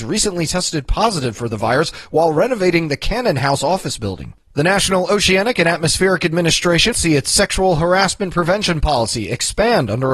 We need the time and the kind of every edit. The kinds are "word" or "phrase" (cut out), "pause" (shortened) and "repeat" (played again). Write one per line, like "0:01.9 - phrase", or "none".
0:04.4 - pause
0:06.9 - word

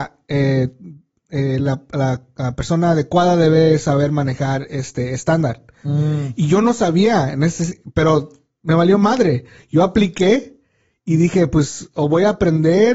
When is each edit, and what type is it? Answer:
none

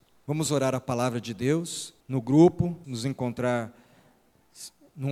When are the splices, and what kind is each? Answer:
0:02.0 - pause
0:02.8 - phrase

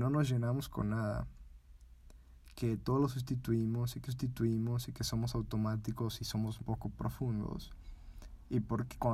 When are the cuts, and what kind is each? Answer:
0:04.1 - repeat
0:06.6 - word

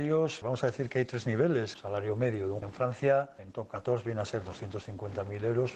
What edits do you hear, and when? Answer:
0:02.6 - word

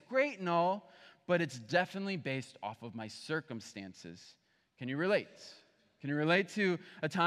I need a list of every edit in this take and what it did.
none

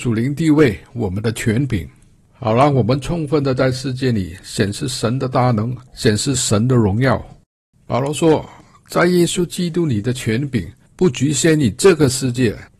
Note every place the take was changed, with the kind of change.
0:05.9 - pause

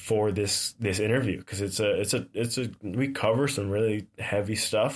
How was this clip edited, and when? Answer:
none

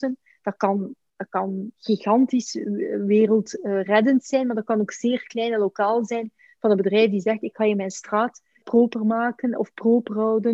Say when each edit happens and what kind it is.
0:08.6 - word

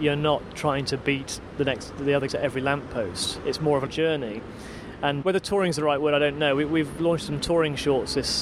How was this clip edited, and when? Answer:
0:02.3 - word
0:03.9 - phrase
0:05.2 - word

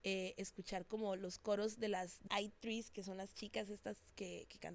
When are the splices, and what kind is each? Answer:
0:02.3 - word

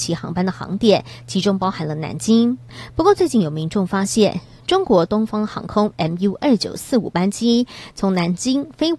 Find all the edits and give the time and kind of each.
none

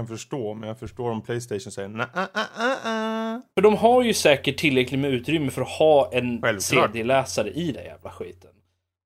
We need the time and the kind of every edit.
0:03.5 - pause
0:07.7 - word

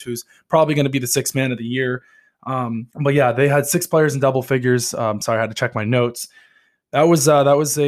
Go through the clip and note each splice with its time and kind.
0:02.9 - pause

